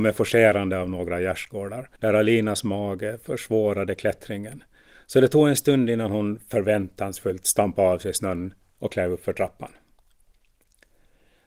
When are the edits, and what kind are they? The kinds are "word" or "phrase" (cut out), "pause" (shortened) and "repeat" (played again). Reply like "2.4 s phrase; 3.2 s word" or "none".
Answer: 1.9 s pause